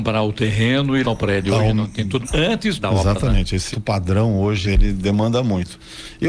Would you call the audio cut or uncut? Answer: cut